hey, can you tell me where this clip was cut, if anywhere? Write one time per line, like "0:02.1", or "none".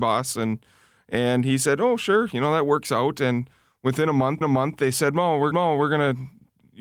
0:04.4
0:05.5